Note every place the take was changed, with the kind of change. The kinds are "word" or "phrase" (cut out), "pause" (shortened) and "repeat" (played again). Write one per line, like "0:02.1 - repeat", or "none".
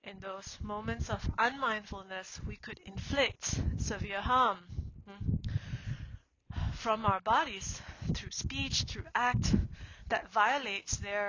none